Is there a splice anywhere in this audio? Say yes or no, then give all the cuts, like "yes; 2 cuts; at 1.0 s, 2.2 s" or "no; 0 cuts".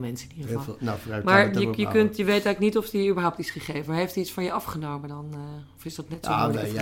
no; 0 cuts